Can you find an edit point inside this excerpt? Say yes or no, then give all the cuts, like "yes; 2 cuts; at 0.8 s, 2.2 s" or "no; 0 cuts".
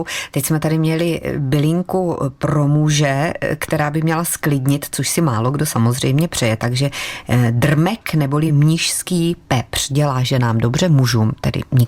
no; 0 cuts